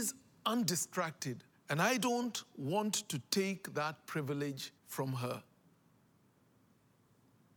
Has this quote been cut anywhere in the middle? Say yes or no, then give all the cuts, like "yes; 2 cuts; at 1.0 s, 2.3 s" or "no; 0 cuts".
yes; 2 cuts; at 1.5 s, 4.8 s